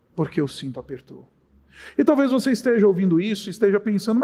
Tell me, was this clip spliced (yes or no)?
no